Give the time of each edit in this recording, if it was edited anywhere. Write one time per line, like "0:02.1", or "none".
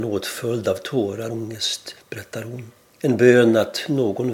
0:01.3
0:02.0
0:02.8